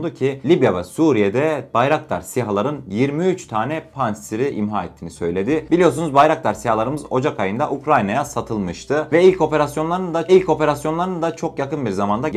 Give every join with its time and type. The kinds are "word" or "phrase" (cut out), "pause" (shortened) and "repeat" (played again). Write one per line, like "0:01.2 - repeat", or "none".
0:10.3 - repeat